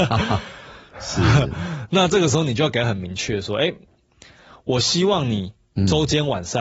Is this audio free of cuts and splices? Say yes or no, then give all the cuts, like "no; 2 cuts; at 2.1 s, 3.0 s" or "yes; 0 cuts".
yes; 0 cuts